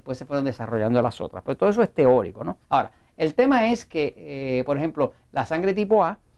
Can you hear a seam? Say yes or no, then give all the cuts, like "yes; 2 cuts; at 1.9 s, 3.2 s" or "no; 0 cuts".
yes; 1 cut; at 2.6 s